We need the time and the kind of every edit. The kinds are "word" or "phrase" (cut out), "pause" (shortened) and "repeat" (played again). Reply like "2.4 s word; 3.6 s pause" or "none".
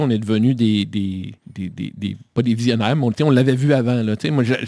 1.4 s pause